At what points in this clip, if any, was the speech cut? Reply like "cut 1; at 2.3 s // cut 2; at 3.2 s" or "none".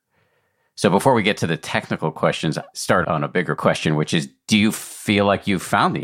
cut 1; at 2.7 s // cut 2; at 3.5 s